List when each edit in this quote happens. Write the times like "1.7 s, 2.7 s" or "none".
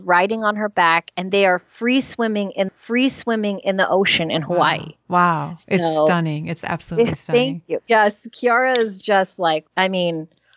2.7 s, 9.7 s